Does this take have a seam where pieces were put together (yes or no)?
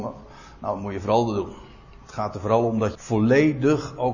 yes